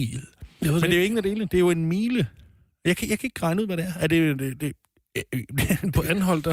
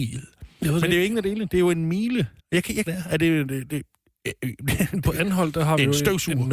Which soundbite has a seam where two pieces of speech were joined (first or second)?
second